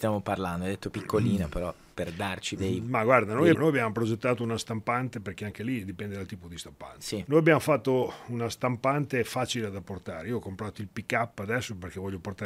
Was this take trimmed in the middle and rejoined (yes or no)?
yes